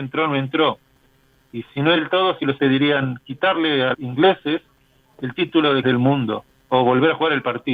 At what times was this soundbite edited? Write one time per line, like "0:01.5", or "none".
0:02.0
0:02.6
0:03.9
0:05.8